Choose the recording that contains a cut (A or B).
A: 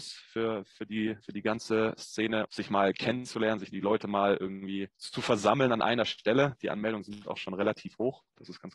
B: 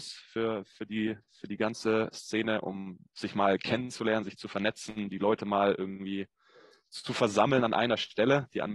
A